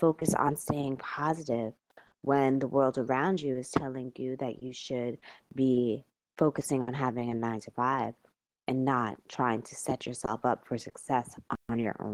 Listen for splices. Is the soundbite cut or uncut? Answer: uncut